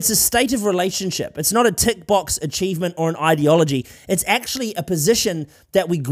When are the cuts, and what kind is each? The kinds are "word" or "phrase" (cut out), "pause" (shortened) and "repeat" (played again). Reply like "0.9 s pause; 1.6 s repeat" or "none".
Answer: none